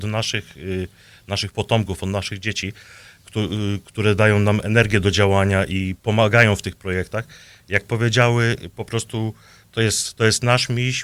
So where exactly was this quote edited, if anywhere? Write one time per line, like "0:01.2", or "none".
0:06.0